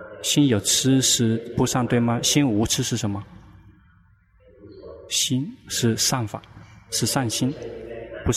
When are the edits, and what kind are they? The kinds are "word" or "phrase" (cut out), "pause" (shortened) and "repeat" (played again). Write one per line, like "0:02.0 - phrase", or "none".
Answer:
none